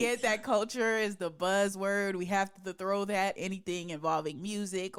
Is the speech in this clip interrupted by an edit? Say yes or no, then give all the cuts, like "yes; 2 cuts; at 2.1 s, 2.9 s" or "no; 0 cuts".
yes; 1 cut; at 3.4 s